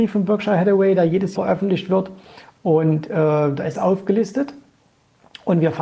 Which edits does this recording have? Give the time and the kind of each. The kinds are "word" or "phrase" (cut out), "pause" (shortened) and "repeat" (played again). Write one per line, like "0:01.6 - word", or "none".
0:01.3 - word
0:03.7 - word